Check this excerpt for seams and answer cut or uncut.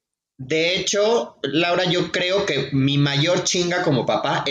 uncut